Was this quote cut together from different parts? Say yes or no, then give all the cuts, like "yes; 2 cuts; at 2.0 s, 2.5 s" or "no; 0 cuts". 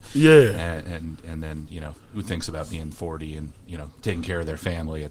no; 0 cuts